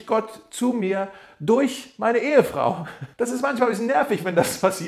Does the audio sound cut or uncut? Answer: cut